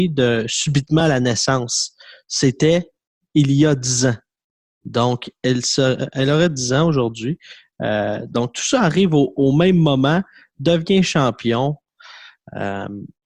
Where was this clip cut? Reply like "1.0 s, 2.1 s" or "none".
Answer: none